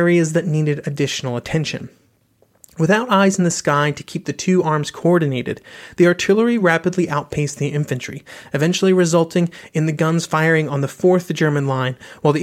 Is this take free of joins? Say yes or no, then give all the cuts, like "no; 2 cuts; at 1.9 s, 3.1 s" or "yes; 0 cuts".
yes; 0 cuts